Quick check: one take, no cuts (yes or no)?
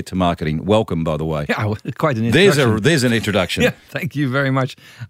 yes